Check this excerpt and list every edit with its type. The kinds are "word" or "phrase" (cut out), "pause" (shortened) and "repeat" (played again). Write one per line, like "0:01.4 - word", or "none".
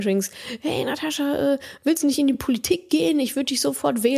none

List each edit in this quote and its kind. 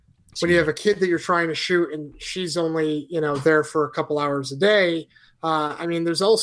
none

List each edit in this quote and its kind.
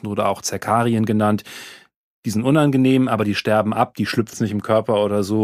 0:04.3 - word

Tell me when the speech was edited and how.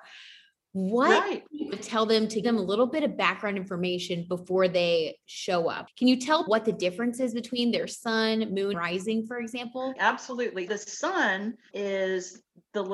0:01.7 - word
0:02.4 - word
0:05.9 - word
0:06.5 - word
0:08.7 - word
0:10.0 - word
0:10.7 - word
0:11.7 - word

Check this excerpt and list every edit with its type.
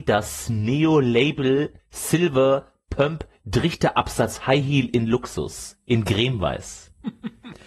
0:01.8 - pause

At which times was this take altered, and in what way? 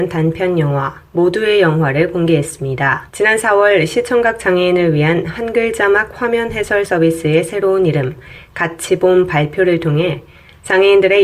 0:03.1 - pause
0:06.9 - word

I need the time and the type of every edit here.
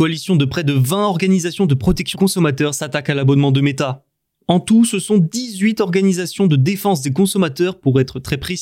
0:02.1 - word

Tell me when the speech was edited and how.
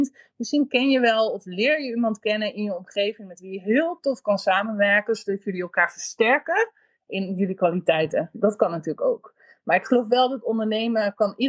none

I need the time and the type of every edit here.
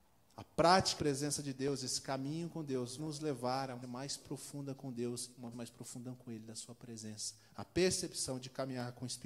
0:01.0 - word
0:03.0 - word
0:03.8 - word
0:05.5 - word

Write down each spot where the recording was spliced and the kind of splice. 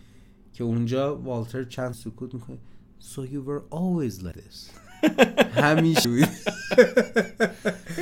0:01.9 - word
0:04.3 - word
0:06.0 - word

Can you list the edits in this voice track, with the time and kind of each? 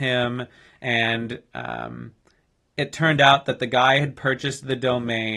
none

